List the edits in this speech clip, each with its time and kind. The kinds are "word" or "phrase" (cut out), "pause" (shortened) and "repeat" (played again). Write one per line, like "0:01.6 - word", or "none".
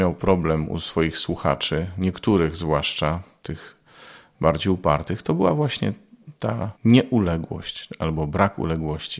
0:06.8 - pause